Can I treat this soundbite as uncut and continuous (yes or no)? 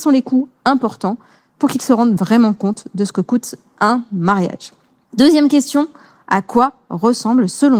yes